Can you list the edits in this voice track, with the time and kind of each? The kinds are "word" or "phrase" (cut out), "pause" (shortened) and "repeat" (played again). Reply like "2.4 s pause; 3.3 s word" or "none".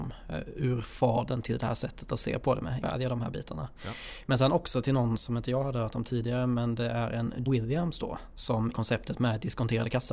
2.8 s word; 5.2 s word; 7.5 s word; 8.7 s word